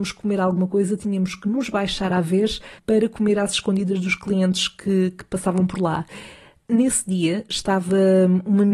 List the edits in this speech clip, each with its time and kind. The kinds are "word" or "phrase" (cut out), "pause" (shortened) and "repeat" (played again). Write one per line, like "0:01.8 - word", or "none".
none